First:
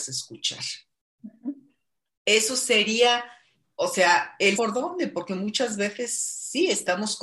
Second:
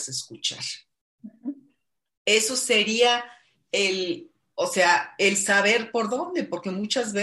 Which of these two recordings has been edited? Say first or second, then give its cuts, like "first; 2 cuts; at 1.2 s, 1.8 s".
first; 2 cuts; at 3.6 s, 4.6 s